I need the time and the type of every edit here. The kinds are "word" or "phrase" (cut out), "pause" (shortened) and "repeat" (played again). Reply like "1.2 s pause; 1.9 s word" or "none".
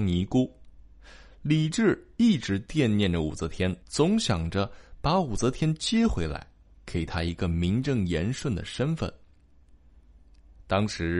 3.8 s pause